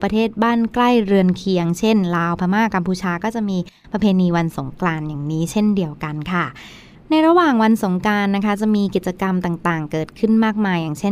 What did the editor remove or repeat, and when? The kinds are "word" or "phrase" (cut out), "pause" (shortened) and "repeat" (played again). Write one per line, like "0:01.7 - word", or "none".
none